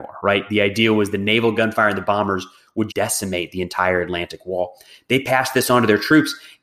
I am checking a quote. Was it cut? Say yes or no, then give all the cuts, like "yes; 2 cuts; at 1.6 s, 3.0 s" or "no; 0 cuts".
yes; 1 cut; at 2.9 s